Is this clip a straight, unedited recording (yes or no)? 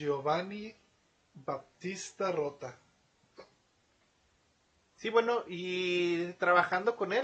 yes